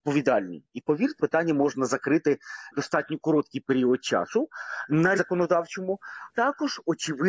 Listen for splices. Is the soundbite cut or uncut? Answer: cut